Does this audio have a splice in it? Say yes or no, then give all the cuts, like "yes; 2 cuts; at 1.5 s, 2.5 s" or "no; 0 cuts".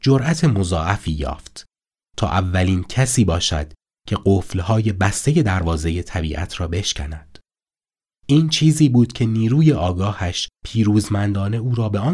no; 0 cuts